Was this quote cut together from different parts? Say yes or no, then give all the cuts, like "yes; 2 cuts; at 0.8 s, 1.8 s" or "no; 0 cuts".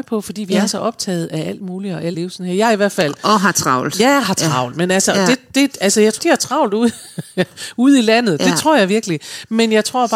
yes; 2 cuts; at 2.1 s, 6.2 s